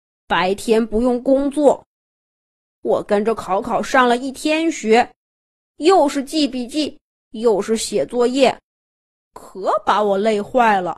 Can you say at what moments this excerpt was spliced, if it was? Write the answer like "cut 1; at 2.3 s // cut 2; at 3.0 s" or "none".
none